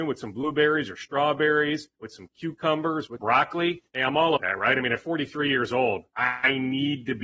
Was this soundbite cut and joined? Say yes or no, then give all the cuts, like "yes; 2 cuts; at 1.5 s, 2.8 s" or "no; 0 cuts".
yes; 5 cuts; at 2.0 s, 3.2 s, 3.9 s, 4.4 s, 6.1 s